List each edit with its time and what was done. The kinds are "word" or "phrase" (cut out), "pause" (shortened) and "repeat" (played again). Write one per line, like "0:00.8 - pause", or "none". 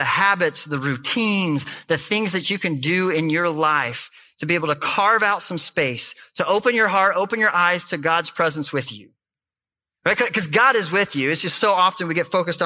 none